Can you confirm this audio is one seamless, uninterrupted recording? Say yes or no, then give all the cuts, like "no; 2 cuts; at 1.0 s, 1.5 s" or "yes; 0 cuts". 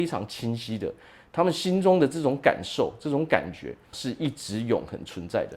no; 1 cut; at 3.9 s